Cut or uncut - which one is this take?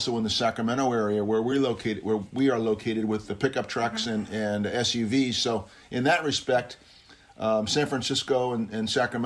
uncut